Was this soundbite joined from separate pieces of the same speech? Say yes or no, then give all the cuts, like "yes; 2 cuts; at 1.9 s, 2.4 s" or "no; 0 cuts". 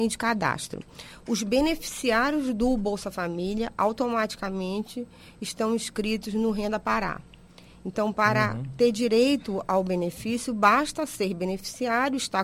no; 0 cuts